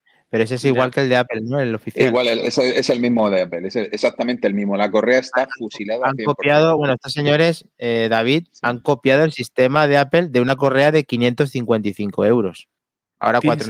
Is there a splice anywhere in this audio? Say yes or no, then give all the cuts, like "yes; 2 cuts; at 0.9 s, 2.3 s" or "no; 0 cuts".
no; 0 cuts